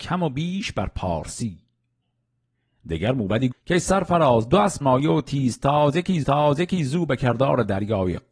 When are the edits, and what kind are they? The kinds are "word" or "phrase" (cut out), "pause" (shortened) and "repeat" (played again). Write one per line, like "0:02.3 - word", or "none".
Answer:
0:03.5 - word
0:04.8 - word
0:06.2 - repeat